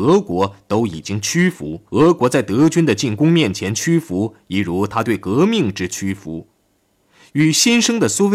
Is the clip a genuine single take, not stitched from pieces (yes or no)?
no